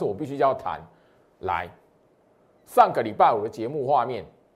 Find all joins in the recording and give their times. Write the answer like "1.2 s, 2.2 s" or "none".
none

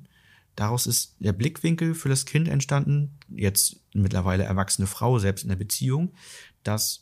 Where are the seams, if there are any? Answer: none

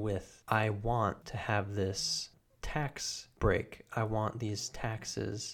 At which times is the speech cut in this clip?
none

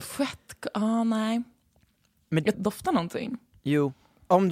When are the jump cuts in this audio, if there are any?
2.5 s

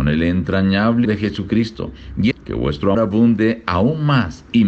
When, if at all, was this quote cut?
1.0 s, 2.3 s, 2.9 s

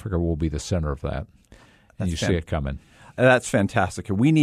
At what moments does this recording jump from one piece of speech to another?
none

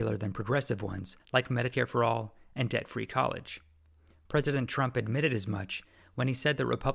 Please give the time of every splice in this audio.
1.2 s

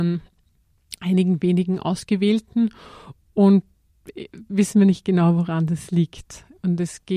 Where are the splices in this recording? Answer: none

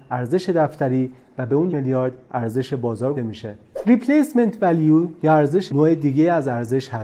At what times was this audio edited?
1.7 s, 3.1 s, 5.7 s

